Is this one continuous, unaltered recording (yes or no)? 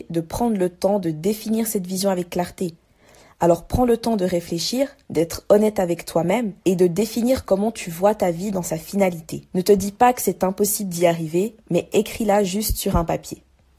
no